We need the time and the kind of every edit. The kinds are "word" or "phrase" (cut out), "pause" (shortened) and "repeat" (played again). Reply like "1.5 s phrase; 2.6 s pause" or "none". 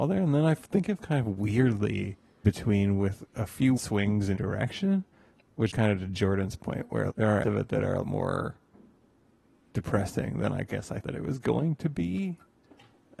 1.0 s word; 2.4 s word; 3.8 s word; 4.4 s word; 5.7 s word; 7.1 s word; 7.4 s word; 8.0 s word; 11.0 s word